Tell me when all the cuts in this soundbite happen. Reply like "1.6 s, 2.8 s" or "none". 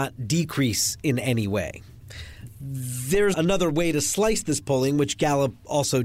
3.3 s